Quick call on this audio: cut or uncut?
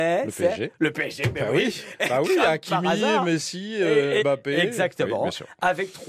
cut